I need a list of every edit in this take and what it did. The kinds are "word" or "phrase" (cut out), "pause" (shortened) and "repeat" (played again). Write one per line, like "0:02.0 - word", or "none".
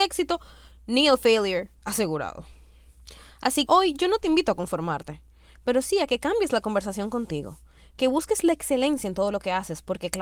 0:03.7 - word